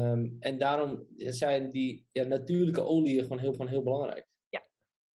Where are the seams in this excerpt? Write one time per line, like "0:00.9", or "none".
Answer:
0:03.5